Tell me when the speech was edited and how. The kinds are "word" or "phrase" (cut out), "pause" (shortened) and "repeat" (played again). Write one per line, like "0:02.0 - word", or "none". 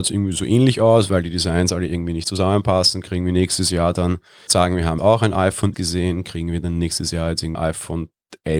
0:04.5 - phrase
0:05.0 - word
0:05.7 - word
0:07.5 - word